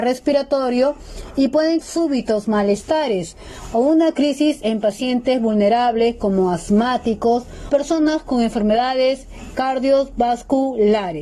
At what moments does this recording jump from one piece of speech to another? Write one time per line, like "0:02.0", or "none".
0:01.8
0:07.7